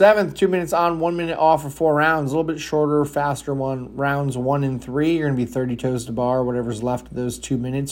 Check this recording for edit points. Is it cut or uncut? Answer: uncut